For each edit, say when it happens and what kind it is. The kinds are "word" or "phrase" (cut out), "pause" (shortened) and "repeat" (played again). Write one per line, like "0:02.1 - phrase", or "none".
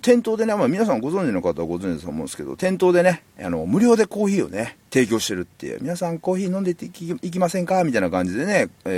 0:04.9 - pause